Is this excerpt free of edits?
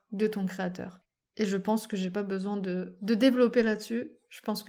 yes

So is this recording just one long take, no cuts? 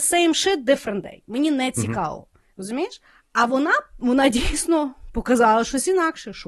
yes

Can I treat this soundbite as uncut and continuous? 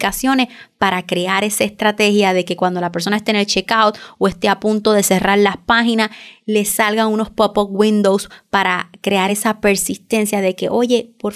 yes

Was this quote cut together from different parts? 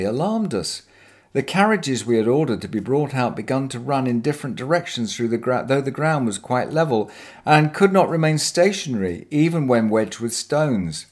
no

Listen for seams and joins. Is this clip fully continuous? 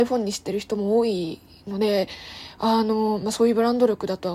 yes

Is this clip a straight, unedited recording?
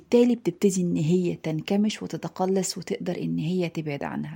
yes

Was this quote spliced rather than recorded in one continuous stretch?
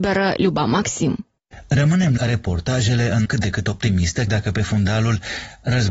yes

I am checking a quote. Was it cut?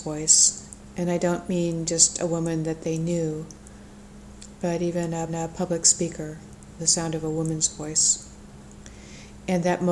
yes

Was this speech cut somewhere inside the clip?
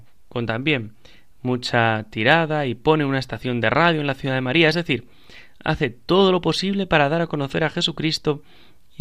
no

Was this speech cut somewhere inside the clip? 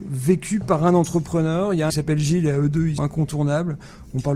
yes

